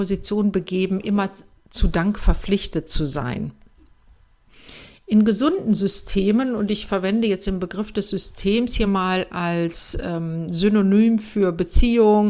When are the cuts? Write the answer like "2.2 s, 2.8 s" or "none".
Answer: none